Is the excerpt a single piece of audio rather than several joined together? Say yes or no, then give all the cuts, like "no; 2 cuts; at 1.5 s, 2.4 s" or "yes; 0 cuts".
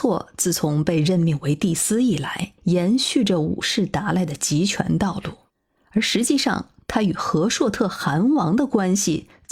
no; 2 cuts; at 2.6 s, 5.5 s